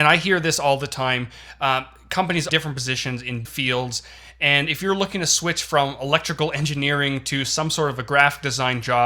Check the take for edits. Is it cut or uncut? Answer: cut